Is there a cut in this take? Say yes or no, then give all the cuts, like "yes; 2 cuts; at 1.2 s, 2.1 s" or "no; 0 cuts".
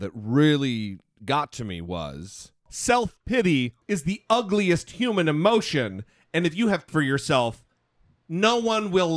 yes; 3 cuts; at 2.6 s, 3.8 s, 6.9 s